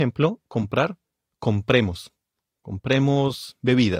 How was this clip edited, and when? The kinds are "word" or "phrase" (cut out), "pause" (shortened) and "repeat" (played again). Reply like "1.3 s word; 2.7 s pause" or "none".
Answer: none

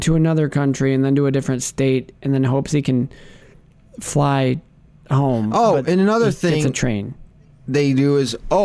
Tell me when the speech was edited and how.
none

